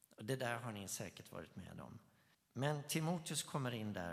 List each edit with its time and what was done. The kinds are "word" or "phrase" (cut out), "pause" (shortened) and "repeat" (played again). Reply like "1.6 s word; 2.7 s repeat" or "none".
2.3 s pause